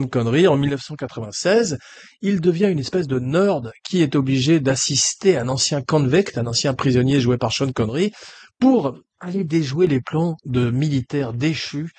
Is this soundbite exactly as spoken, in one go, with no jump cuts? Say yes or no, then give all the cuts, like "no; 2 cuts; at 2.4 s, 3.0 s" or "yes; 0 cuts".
yes; 0 cuts